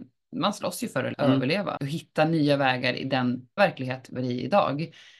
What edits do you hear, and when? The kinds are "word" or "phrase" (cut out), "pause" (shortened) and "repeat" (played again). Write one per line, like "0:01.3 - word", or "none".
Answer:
0:01.1 - word
0:01.8 - word
0:03.6 - word
0:04.2 - word